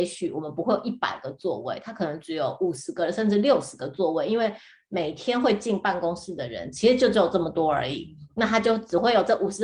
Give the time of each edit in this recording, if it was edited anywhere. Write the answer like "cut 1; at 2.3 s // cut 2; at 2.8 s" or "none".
none